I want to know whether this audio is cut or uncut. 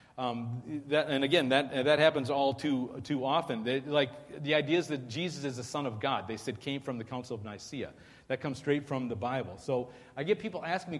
uncut